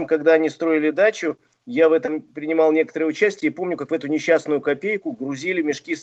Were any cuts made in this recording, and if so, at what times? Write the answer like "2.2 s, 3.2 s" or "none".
none